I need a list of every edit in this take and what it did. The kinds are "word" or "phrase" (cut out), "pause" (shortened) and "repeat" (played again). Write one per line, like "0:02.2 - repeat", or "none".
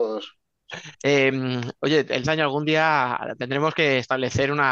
0:00.9 - pause
0:02.2 - phrase